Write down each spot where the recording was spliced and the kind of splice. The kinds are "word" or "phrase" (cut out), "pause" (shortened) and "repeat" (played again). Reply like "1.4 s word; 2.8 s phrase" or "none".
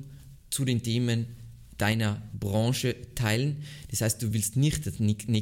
none